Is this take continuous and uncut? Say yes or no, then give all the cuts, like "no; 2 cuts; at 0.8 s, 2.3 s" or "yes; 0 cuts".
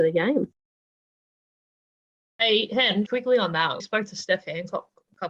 no; 2 cuts; at 3.1 s, 3.8 s